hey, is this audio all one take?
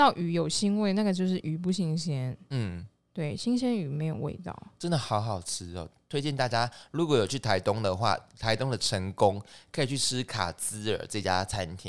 yes; 0 cuts

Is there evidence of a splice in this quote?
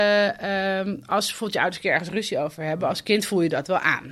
no; 0 cuts

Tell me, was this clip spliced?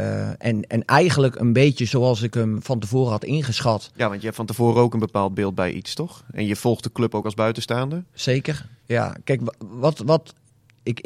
no; 0 cuts

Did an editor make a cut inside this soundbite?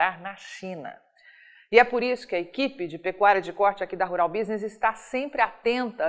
no; 0 cuts

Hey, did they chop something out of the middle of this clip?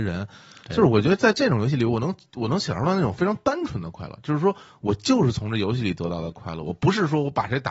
no; 0 cuts

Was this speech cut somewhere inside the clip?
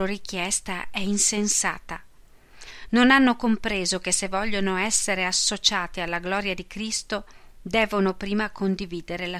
no; 0 cuts

